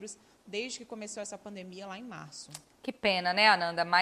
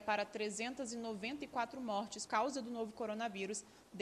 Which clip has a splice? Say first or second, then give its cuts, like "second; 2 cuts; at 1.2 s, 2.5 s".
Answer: second; 1 cut; at 2.3 s